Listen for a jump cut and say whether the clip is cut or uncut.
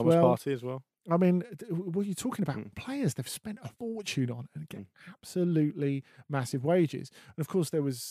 cut